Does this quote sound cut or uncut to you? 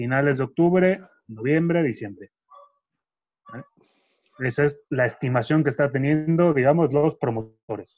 uncut